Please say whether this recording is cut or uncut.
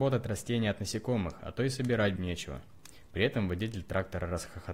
cut